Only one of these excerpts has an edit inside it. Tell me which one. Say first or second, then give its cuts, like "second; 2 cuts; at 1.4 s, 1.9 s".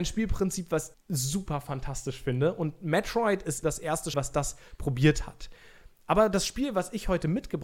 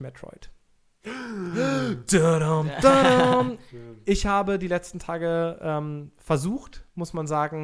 first; 3 cuts; at 0.9 s, 3.6 s, 4.1 s